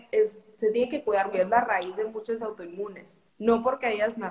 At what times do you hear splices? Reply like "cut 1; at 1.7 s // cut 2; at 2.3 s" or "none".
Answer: cut 1; at 1.3 s // cut 2; at 2.4 s // cut 3; at 3.3 s

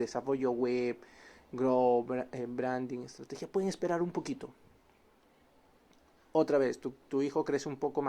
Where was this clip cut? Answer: none

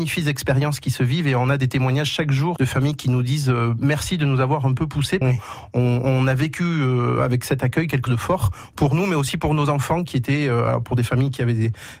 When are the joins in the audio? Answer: cut 1; at 2.6 s // cut 2; at 5.2 s // cut 3; at 8.1 s

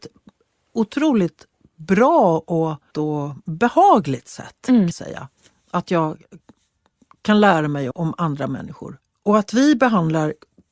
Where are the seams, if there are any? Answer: cut 1; at 2.9 s // cut 2; at 4.9 s // cut 3; at 7.9 s

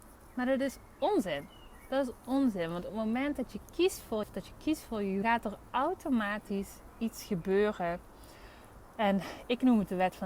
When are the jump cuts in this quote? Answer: cut 1; at 2.9 s // cut 2; at 4.2 s // cut 3; at 5.2 s

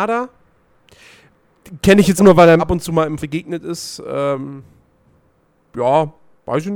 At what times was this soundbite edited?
cut 1; at 2.2 s // cut 2; at 2.6 s // cut 3; at 3.2 s

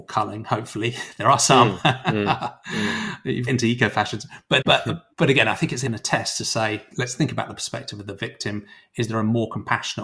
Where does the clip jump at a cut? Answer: cut 1; at 3.5 s // cut 2; at 4.6 s // cut 3; at 5.1 s // cut 4; at 5.9 s // cut 5; at 6.9 s

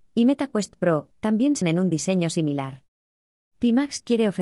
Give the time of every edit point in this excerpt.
cut 1; at 1.1 s // cut 2; at 1.6 s

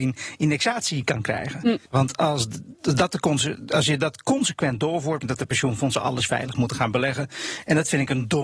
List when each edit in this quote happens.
cut 1; at 1.9 s // cut 2; at 5.2 s

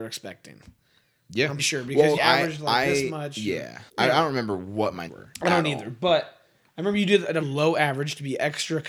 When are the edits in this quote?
cut 1; at 1.6 s // cut 2; at 2.2 s // cut 3; at 3.9 s // cut 4; at 5.1 s // cut 5; at 7.4 s

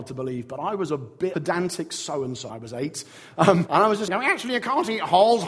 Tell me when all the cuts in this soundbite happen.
cut 1; at 1.3 s // cut 2; at 2.5 s // cut 3; at 3.7 s // cut 4; at 4.1 s

